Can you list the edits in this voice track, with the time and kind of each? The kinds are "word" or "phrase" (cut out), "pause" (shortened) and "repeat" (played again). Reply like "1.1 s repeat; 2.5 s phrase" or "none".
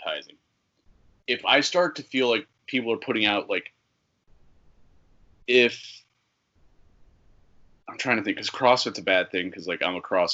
none